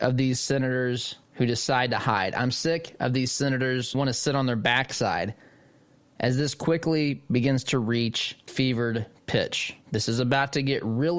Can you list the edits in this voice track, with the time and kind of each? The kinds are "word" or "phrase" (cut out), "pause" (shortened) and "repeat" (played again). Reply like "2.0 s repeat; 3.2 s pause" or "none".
1.2 s pause; 3.9 s word; 6.0 s pause; 8.5 s word; 9.8 s pause